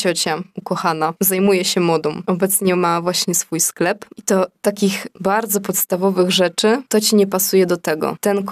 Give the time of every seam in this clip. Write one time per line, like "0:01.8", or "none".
0:06.9

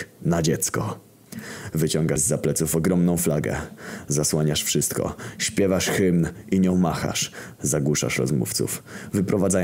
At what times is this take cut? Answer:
0:02.2

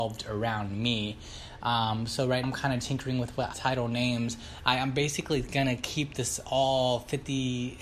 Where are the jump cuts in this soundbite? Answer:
0:02.4
0:03.5

